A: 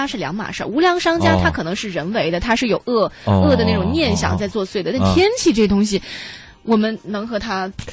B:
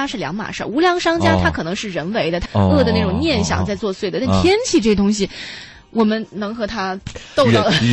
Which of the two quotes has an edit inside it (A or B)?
B